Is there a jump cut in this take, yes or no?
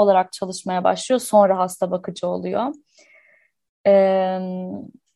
no